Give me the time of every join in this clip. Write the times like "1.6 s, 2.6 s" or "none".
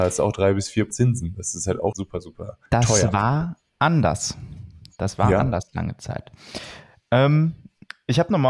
0.9 s, 1.9 s, 2.7 s